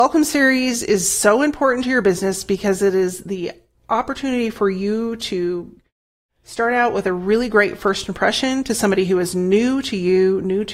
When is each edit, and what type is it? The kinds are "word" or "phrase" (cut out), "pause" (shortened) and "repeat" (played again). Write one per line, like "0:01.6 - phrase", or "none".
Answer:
none